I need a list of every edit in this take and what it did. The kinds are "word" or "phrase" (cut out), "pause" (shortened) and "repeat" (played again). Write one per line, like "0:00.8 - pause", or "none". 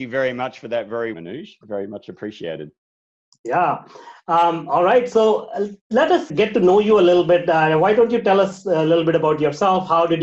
0:01.1 - phrase
0:06.3 - word